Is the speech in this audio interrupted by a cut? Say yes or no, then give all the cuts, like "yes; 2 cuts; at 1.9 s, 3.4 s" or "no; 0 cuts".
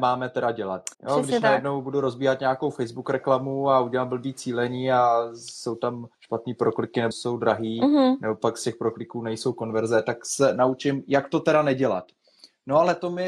yes; 3 cuts; at 0.9 s, 6.1 s, 7.1 s